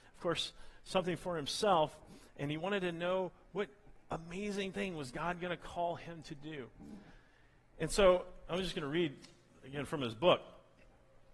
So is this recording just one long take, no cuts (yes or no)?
yes